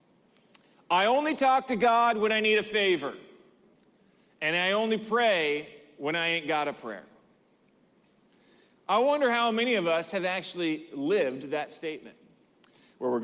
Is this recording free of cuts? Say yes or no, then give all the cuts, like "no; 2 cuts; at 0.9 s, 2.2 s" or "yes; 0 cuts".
yes; 0 cuts